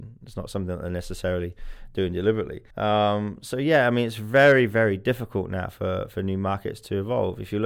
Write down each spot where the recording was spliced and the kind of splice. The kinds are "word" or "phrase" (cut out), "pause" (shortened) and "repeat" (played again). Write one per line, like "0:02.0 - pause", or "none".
0:02.7 - pause

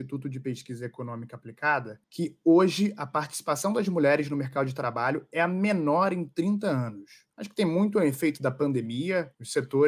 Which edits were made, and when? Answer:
none

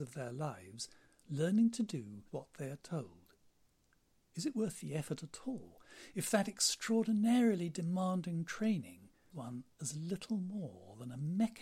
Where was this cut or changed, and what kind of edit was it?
0:02.3 - word
0:09.3 - word

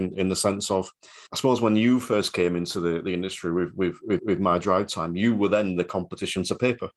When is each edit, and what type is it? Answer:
0:01.3 - pause
0:04.2 - repeat

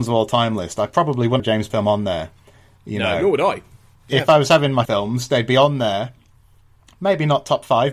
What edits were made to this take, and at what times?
0:01.4 - word
0:01.7 - word
0:04.8 - word

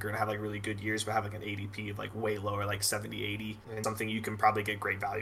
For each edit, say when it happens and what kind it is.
0:03.8 - word

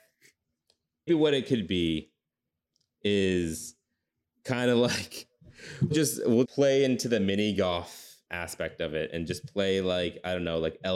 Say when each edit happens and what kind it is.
0:01.1 - word
0:05.9 - word
0:06.4 - word
0:08.3 - word

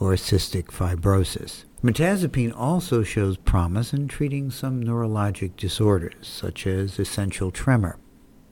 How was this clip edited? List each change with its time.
0:01.7 - pause

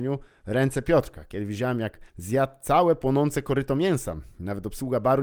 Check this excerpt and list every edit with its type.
0:02.1 - pause

